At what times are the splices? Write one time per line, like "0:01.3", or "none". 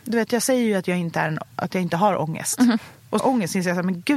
0:03.2